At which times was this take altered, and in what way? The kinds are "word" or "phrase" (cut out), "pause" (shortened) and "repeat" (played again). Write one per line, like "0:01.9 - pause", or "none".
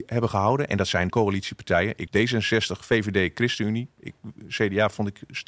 0:01.1 - phrase
0:02.1 - word